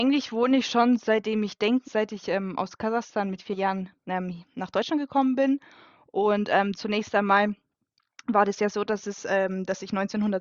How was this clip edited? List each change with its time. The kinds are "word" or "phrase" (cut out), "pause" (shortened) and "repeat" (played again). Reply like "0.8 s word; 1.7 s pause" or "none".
1.8 s phrase

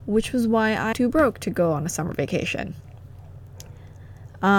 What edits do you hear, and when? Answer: 0.9 s word

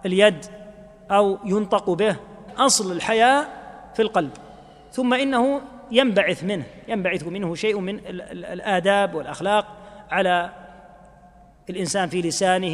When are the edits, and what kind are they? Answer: 2.5 s word

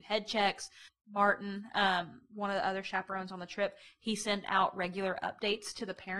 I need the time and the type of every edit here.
none

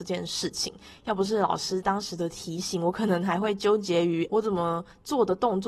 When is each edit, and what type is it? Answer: 4.3 s word

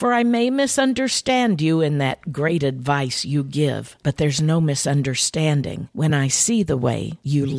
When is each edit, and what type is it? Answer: none

